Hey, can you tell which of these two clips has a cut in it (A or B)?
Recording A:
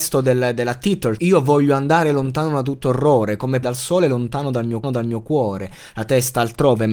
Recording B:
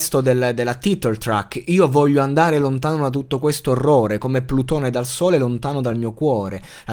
A